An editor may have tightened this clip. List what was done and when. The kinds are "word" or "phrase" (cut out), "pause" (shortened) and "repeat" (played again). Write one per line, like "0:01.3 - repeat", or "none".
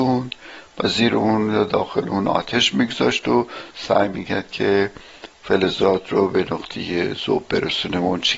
0:03.7 - pause